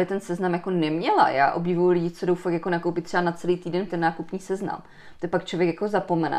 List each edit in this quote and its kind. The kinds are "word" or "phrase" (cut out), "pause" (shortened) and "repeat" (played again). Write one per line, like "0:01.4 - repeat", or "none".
0:03.9 - phrase